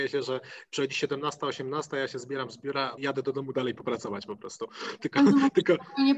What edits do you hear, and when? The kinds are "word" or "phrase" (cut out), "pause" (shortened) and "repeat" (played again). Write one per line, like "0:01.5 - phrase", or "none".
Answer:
0:03.0 - word